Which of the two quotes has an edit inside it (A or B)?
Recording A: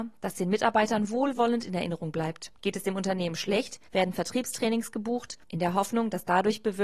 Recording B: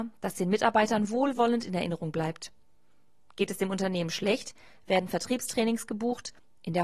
A